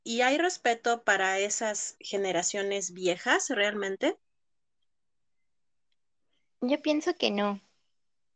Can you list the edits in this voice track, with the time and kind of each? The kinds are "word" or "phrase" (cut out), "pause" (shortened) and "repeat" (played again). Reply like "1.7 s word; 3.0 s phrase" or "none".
none

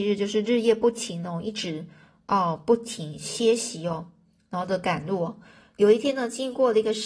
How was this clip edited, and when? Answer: none

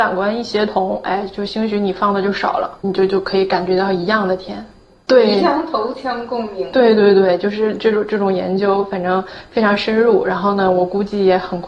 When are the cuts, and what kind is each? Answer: none

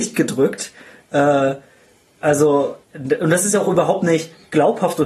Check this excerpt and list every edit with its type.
2.8 s pause

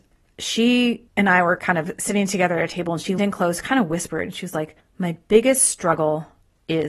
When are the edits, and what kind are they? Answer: 1.1 s pause; 3.2 s word; 4.8 s pause

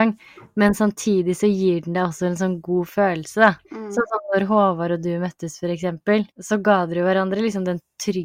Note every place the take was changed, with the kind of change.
3.6 s pause; 6.3 s pause

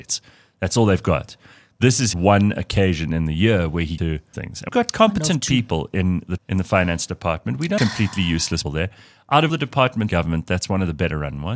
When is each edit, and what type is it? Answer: 2.1 s word; 4.0 s word; 4.3 s word; 4.7 s word; 6.4 s word; 7.8 s word; 8.6 s word; 9.5 s word; 10.1 s word

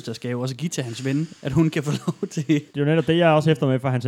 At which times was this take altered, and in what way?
1.4 s pause; 2.7 s pause

